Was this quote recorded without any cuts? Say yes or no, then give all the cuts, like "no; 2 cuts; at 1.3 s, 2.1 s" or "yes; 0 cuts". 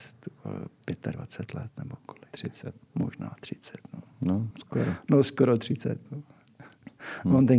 no; 1 cut; at 4.5 s